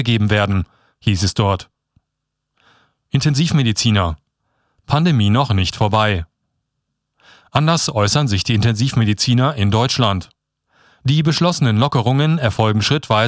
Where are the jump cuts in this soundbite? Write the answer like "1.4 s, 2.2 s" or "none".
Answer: none